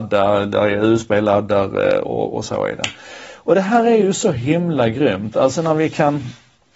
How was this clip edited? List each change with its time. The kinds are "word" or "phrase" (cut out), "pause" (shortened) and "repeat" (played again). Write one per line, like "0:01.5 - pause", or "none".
none